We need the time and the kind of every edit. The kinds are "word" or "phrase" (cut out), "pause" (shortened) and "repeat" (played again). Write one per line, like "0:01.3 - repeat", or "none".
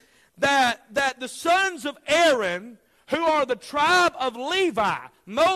none